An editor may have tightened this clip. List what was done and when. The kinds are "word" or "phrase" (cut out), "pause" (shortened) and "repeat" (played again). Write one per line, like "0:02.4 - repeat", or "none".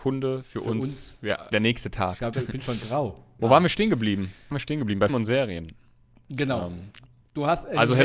0:01.5 - word
0:02.3 - word
0:03.4 - word
0:04.5 - word
0:05.1 - word